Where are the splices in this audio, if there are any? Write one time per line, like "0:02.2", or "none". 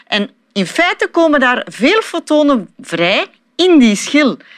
none